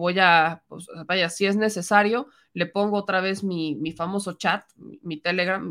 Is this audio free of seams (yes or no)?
yes